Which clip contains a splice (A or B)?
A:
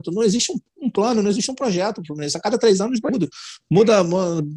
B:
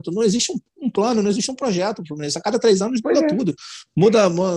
A